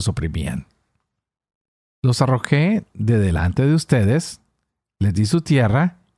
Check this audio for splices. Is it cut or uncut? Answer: uncut